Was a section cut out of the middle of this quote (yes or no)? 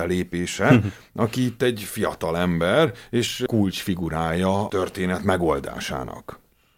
yes